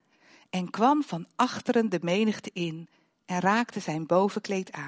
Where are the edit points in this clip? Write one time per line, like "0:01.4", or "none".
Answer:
none